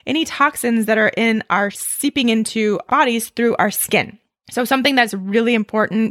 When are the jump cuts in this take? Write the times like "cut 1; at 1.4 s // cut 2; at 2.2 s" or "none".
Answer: cut 1; at 1.7 s // cut 2; at 2.9 s